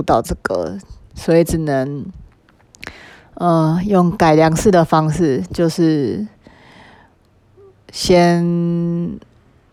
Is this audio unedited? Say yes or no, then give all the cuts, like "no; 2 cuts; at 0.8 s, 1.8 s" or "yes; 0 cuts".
yes; 0 cuts